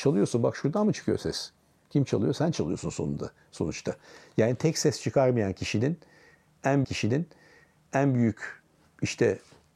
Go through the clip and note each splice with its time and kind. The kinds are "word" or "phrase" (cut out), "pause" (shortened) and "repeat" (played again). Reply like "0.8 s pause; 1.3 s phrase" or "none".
6.8 s repeat